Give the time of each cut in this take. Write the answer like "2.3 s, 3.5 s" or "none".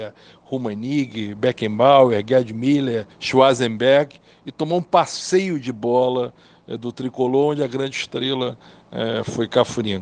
3.1 s